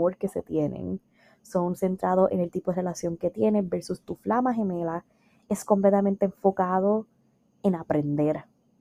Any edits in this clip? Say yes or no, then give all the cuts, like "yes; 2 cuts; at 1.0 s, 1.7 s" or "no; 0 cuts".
no; 0 cuts